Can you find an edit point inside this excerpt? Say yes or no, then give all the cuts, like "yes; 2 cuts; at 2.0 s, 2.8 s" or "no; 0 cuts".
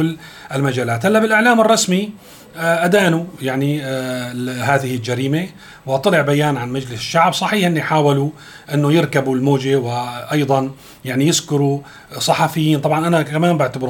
no; 0 cuts